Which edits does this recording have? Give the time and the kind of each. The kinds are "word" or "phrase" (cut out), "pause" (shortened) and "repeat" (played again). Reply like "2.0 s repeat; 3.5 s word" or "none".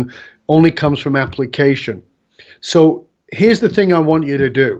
none